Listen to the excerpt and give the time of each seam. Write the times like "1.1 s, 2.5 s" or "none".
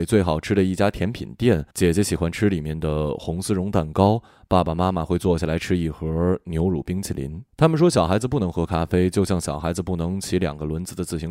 1.7 s, 7.5 s